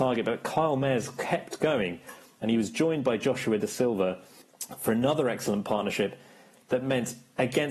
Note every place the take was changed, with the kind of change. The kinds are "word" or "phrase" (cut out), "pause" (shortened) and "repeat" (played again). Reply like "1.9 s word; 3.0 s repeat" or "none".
none